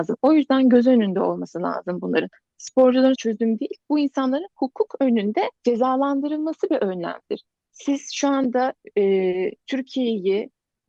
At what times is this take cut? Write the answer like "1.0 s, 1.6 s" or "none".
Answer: 3.2 s, 3.8 s, 5.6 s